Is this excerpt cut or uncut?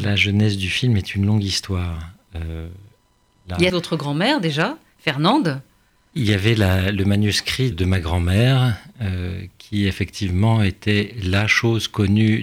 cut